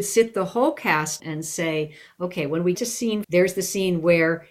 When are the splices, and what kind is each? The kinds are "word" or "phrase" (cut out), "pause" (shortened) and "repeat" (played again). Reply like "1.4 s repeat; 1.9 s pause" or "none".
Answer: 1.2 s word; 2.7 s word; 3.2 s word